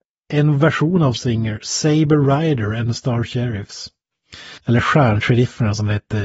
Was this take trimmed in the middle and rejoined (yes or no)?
yes